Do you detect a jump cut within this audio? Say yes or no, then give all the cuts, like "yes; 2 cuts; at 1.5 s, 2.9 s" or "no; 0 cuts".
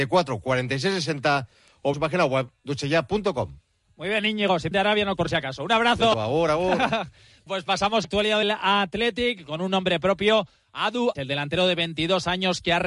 yes; 8 cuts; at 1.9 s, 4.7 s, 5.2 s, 6.1 s, 7.5 s, 8.0 s, 8.4 s, 11.2 s